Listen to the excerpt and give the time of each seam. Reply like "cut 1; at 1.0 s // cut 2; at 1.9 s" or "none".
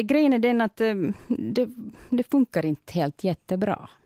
none